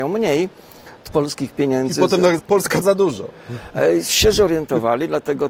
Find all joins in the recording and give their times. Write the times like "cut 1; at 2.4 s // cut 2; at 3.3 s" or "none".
cut 1; at 1.1 s // cut 2; at 2.4 s // cut 3; at 2.8 s